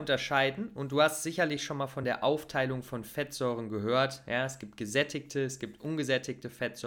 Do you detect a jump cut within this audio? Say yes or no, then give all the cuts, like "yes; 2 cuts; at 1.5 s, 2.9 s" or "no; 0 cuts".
no; 0 cuts